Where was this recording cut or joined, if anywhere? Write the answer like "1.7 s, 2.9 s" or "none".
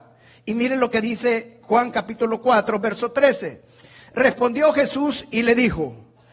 none